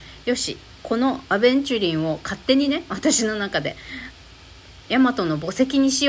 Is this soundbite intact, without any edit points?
yes; 0 cuts

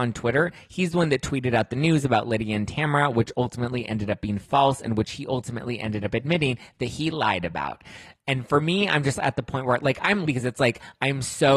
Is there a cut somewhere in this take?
yes; 1 cut; at 10.2 s

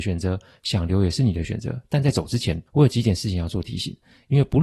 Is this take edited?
yes; 1 cut; at 2.7 s

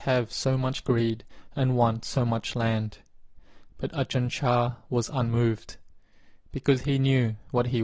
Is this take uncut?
yes; 0 cuts

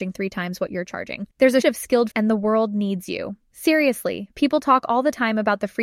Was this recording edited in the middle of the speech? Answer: yes; 3 cuts; at 1.3 s, 1.6 s, 2.1 s

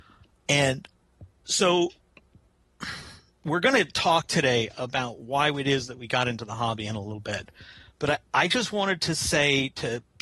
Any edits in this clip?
no; 0 cuts

